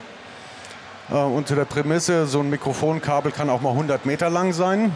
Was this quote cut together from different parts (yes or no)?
no